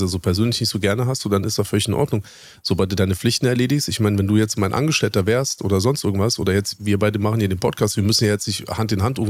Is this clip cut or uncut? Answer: uncut